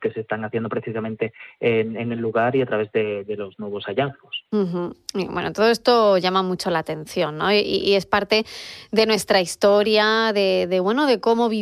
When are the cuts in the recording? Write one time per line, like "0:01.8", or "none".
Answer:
0:04.5